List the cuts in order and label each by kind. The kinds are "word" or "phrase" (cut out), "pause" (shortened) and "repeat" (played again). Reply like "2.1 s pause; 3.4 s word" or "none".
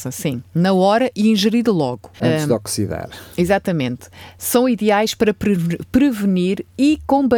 2.1 s pause